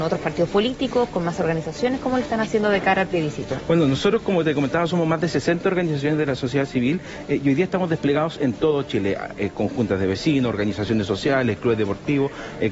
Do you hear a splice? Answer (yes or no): no